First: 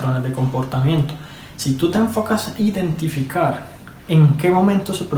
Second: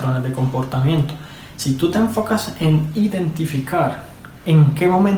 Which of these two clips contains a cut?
first; 1 cut; at 2.6 s

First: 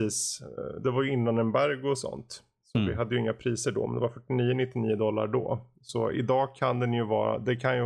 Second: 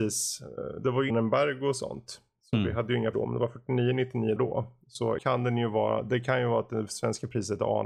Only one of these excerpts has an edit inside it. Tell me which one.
second; 4 cuts; at 1.1 s, 3.1 s, 4.4 s, 5.2 s

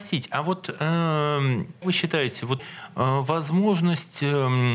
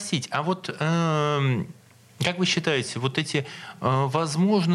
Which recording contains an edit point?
first; 2 cuts; at 1.8 s, 2.6 s

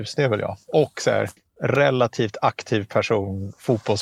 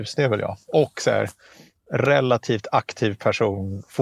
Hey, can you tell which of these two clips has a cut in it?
first; 1 cut; at 1.4 s

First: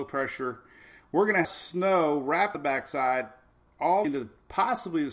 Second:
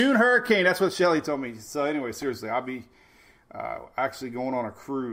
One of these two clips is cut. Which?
first; 3 cuts; at 1.4 s, 2.5 s, 4.0 s

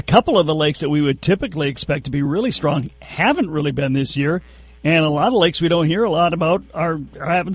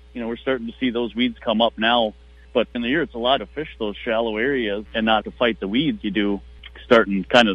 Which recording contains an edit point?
second; 6 cuts; at 1.4 s, 2.7 s, 3.4 s, 4.9 s, 5.2 s, 6.0 s

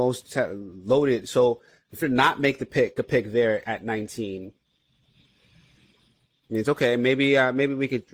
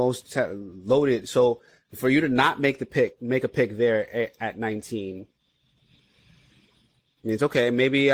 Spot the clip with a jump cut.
first; 3 cuts; at 2.0 s, 3.0 s, 3.6 s

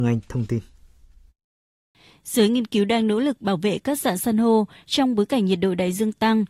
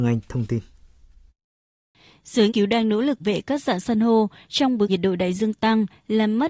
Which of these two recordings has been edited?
second; 3 cuts; at 2.5 s, 3.2 s, 4.9 s

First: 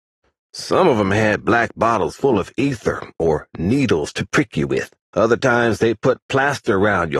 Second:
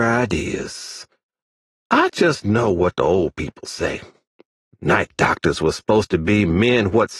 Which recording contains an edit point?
first; 1 cut; at 5.0 s

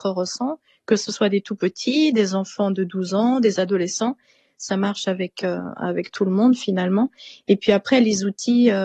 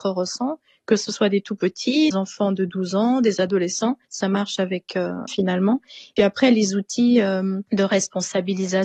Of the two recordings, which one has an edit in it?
second; 5 cuts; at 2.1 s, 4.1 s, 5.3 s, 6.2 s, 7.7 s

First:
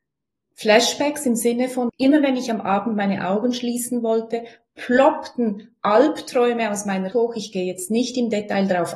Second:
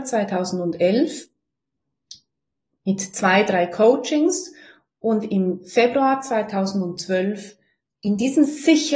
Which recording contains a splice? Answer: first; 2 cuts; at 1.9 s, 7.1 s

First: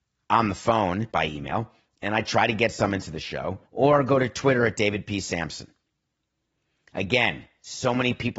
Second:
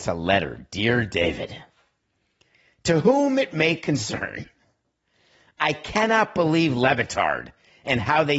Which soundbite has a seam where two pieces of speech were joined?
first; 2 cuts; at 1.1 s, 3.6 s

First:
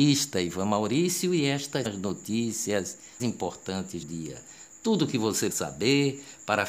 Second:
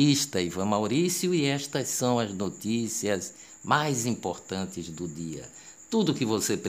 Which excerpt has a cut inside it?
first; 4 cuts; at 1.8 s, 3.2 s, 4.0 s, 5.5 s

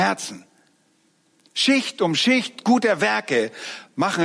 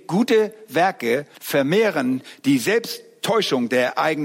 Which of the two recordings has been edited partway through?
second; 1 cut; at 1.3 s

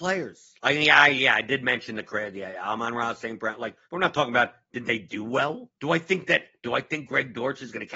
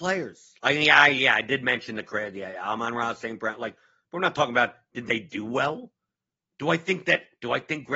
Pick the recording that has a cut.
first; 2 cuts; at 3.8 s, 5.8 s

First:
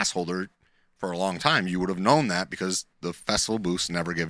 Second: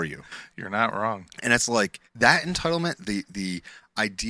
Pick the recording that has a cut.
second; 1 cut; at 2.1 s

